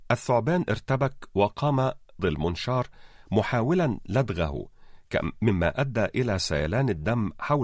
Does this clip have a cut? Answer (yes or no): yes